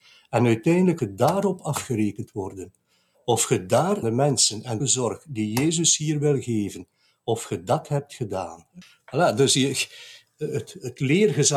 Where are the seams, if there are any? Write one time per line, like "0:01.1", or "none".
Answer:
0:01.0
0:04.0
0:04.8